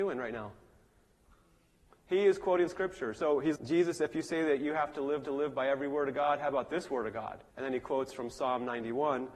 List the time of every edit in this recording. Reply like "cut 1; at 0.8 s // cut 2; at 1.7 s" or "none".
cut 1; at 3.6 s // cut 2; at 5.2 s // cut 3; at 7.5 s